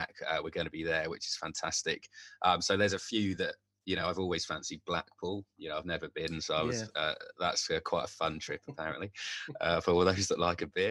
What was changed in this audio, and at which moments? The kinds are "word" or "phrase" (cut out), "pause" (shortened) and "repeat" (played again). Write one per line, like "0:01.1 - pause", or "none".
none